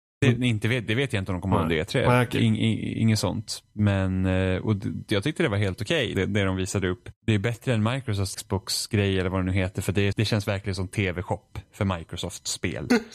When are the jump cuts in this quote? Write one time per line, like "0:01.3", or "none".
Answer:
0:06.1
0:07.2
0:08.3
0:10.1